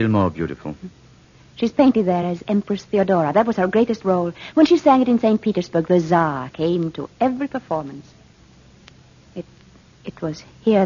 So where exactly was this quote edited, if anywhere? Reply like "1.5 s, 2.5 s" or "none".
none